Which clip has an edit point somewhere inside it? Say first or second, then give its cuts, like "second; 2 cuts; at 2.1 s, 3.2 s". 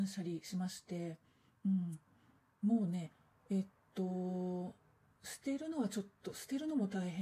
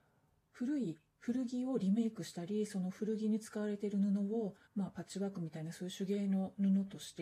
second; 1 cut; at 4.6 s